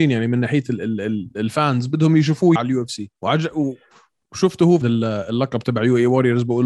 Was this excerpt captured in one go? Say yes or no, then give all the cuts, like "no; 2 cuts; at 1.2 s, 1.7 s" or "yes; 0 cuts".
no; 3 cuts; at 2.6 s, 3.2 s, 4.8 s